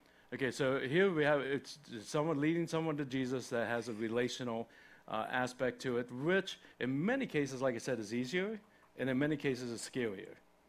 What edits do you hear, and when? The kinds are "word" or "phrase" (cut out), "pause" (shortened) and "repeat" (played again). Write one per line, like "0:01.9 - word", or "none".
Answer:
0:06.7 - pause